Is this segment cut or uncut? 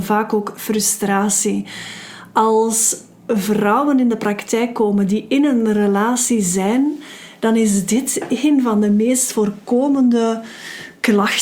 uncut